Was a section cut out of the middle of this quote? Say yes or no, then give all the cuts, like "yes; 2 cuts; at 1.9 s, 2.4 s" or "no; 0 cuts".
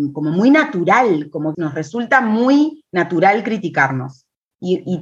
yes; 1 cut; at 1.5 s